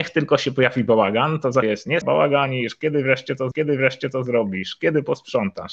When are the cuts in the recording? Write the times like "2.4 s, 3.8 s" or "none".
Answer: 1.6 s, 2.0 s, 3.5 s

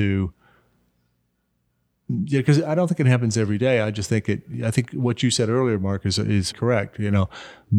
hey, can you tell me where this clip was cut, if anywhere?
6.5 s

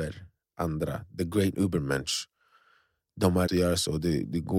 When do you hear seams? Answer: 1.5 s, 3.5 s

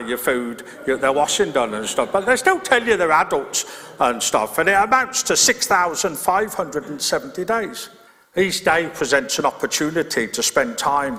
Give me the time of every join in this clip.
8.1 s

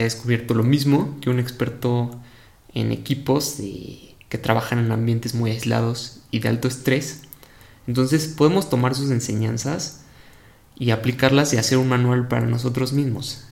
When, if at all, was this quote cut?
none

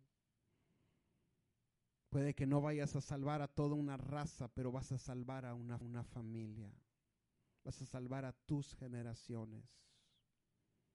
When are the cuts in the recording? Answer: 5.8 s

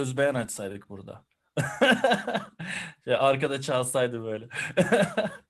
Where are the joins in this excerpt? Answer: none

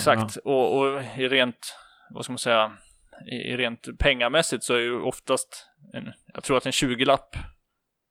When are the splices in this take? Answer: none

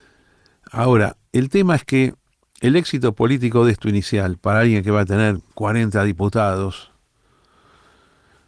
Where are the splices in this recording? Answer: 1.3 s, 2.3 s, 5.5 s

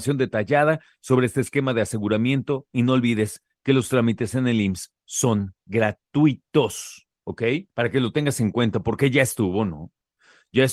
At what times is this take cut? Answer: 7.7 s

